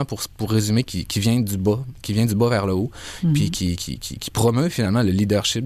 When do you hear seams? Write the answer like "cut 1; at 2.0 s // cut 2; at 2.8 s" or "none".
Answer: cut 1; at 3.8 s